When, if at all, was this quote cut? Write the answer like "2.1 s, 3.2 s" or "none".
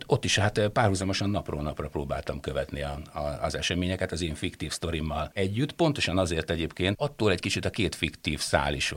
6.9 s